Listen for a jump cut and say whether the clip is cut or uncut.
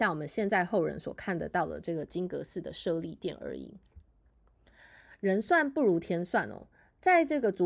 uncut